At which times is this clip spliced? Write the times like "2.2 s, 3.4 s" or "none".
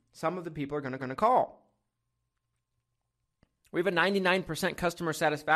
1.0 s